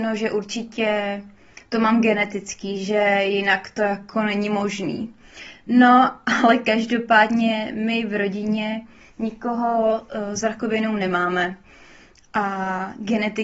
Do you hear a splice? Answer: no; 0 cuts

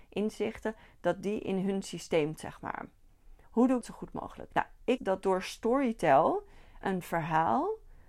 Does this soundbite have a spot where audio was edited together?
yes; 5 cuts; at 2.4 s, 3.4 s, 3.8 s, 5.0 s, 6.8 s

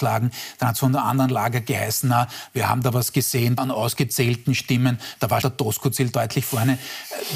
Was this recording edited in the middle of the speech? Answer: yes; 2 cuts; at 3.6 s, 5.4 s

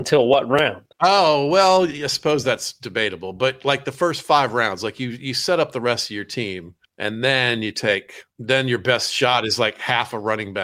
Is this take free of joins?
no; 3 cuts; at 0.9 s, 6.9 s, 8.3 s

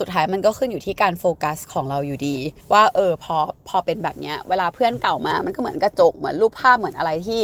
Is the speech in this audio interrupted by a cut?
yes; 1 cut; at 2.6 s

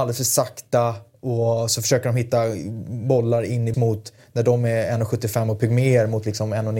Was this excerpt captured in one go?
no; 1 cut; at 3.7 s

